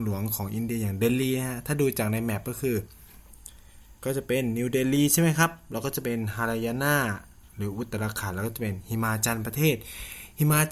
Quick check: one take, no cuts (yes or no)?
no